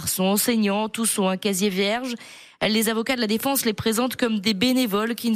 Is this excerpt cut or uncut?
uncut